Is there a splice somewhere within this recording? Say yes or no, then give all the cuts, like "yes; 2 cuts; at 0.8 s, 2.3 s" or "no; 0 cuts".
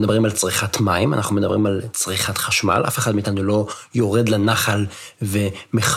no; 0 cuts